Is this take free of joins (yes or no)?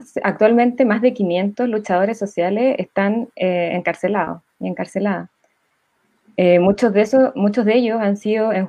yes